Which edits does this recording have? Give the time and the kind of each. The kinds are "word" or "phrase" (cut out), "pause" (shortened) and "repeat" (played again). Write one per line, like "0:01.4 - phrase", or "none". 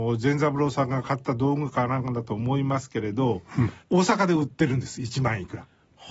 0:03.8 - pause